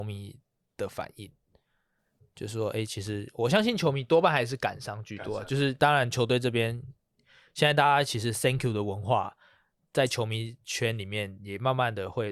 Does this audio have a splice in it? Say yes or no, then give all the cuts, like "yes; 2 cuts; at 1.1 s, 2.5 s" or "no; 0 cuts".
no; 0 cuts